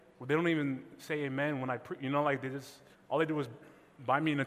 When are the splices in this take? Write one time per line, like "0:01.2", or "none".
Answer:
0:02.9

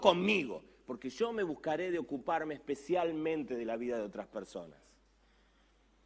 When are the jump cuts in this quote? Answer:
none

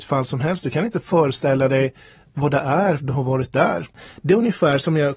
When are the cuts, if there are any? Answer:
0:03.0

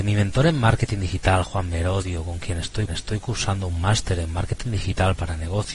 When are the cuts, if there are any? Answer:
0:02.9

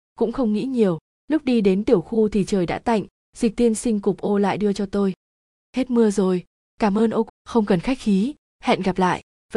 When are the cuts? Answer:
0:07.3

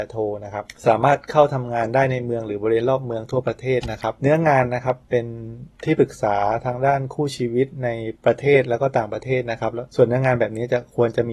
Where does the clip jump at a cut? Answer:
0:08.2

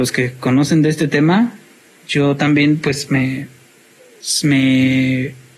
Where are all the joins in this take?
none

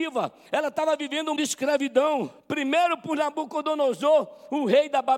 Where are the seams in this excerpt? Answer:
0:01.4
0:02.4

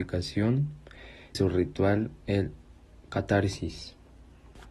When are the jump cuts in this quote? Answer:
0:01.3
0:03.1

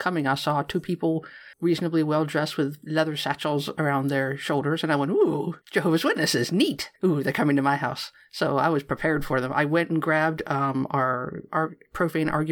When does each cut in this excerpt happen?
0:01.5
0:05.6
0:07.0

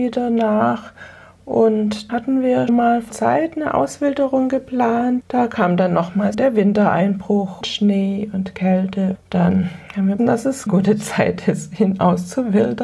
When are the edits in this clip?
0:02.1
0:02.7
0:03.1
0:05.2
0:06.3
0:07.6
0:09.1
0:10.2
0:10.7

